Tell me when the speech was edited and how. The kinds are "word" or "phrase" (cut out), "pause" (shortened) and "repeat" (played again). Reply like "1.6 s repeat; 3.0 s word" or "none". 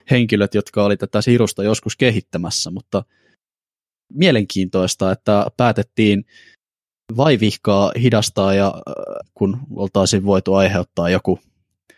9.2 s word